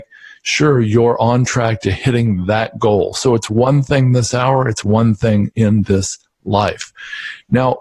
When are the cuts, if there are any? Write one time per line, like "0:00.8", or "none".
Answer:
none